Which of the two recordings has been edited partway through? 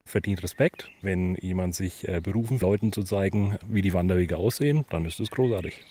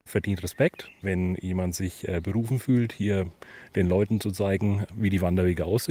first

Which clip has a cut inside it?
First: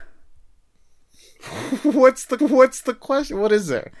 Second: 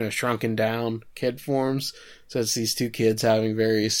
first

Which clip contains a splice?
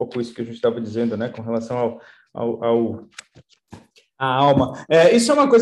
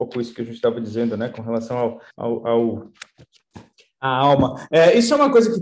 second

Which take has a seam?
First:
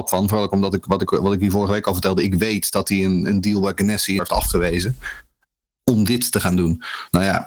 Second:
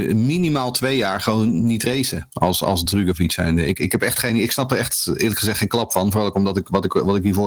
first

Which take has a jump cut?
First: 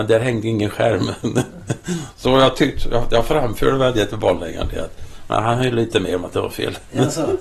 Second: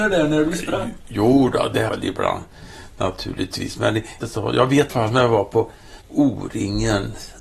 second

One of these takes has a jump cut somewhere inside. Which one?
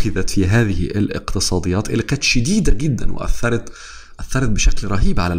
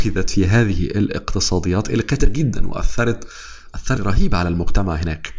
second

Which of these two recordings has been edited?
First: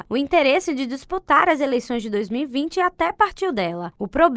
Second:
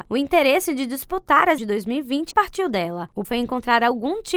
second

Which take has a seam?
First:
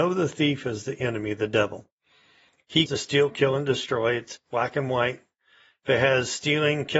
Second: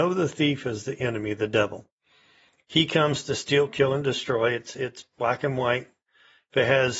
first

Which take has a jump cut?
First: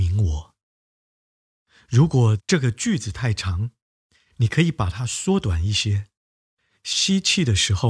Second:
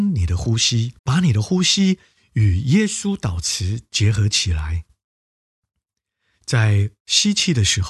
second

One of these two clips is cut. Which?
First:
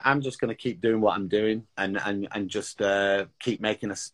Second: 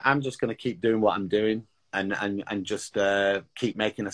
first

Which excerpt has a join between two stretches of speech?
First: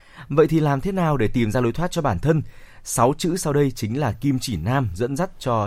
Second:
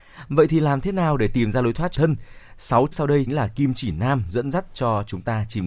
second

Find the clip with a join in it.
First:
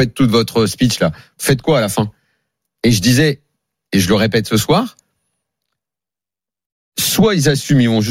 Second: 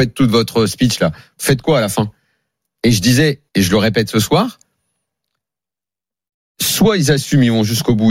second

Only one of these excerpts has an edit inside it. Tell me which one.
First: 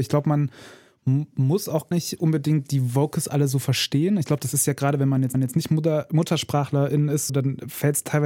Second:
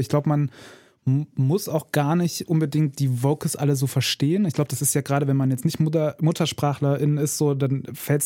first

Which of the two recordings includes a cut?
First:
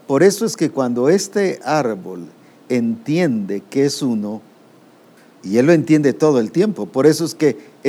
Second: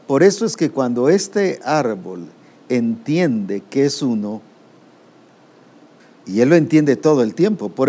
first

